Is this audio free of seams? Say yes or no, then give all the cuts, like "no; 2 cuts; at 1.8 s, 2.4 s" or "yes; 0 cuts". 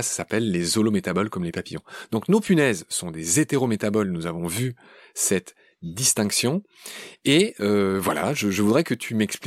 yes; 0 cuts